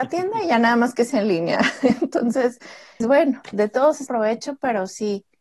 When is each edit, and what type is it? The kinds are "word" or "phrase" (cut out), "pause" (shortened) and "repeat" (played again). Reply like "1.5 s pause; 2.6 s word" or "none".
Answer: 3.0 s word; 3.5 s word; 4.1 s word